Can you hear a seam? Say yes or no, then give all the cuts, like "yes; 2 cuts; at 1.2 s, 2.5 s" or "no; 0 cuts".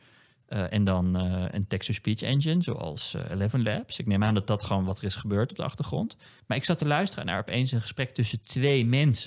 yes; 1 cut; at 6.4 s